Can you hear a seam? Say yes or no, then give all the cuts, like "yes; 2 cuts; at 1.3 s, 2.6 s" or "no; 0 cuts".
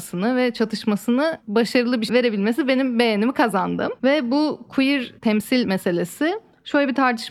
yes; 2 cuts; at 2.1 s, 5.2 s